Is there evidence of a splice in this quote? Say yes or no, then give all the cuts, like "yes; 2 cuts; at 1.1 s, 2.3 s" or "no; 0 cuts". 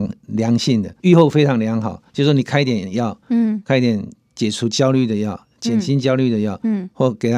yes; 3 cuts; at 1.0 s, 2.1 s, 3.2 s